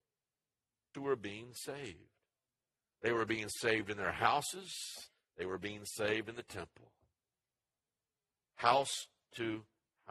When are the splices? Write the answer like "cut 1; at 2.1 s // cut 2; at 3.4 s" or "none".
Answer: cut 1; at 0.9 s